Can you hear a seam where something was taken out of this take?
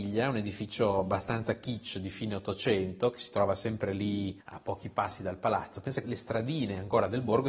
yes; 2 cuts; at 4.4 s, 6.0 s

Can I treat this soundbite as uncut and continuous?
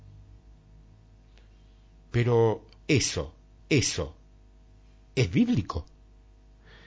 no; 1 cut; at 3.6 s

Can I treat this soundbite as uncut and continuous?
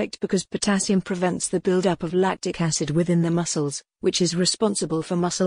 yes; 0 cuts

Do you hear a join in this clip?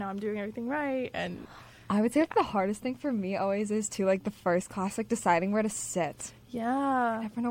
no; 0 cuts

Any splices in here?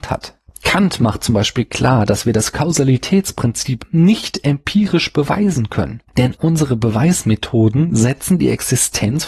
yes; 1 cut; at 6.4 s

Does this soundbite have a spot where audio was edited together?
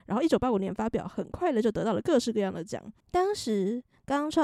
yes; 1 cut; at 3.0 s

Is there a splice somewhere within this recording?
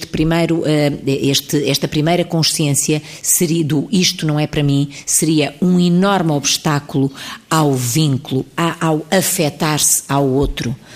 no; 0 cuts

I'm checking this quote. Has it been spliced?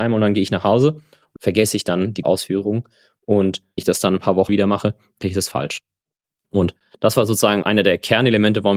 yes; 6 cuts; at 1.4 s, 2.2 s, 3.8 s, 4.5 s, 5.2 s, 7.6 s

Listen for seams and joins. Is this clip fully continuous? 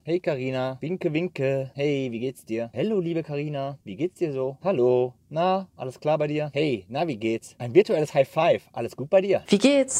yes; 0 cuts

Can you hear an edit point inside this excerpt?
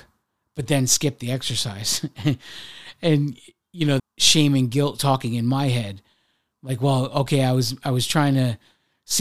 yes; 1 cut; at 4.0 s

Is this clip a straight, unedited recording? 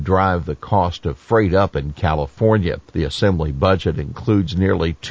no; 1 cut; at 2.9 s

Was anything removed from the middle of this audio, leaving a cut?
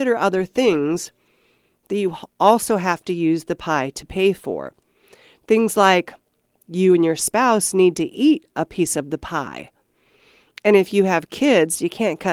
no; 0 cuts

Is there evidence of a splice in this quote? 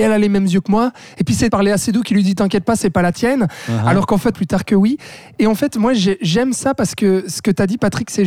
yes; 2 cuts; at 1.5 s, 4.3 s

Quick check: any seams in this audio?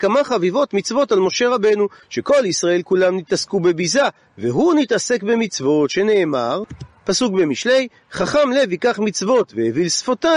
no; 0 cuts

